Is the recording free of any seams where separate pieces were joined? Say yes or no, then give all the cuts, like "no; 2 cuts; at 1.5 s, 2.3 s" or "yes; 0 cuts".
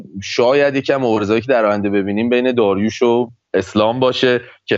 yes; 0 cuts